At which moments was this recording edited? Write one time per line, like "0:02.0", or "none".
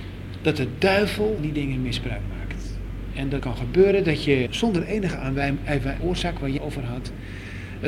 0:01.4
0:03.4
0:04.5
0:06.0
0:06.6